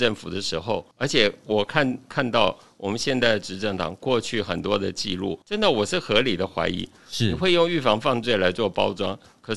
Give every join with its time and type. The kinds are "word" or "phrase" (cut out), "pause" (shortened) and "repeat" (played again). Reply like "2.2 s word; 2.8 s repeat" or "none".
0.9 s pause; 5.4 s pause